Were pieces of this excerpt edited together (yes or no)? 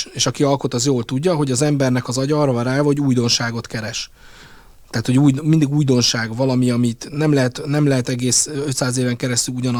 no